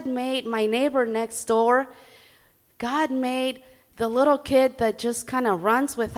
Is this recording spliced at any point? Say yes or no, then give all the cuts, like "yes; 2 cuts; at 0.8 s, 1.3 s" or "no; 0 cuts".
no; 0 cuts